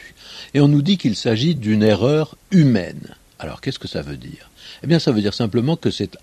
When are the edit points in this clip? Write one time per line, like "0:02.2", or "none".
none